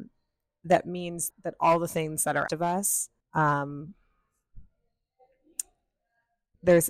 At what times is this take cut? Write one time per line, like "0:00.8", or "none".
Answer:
0:01.3
0:02.5
0:03.2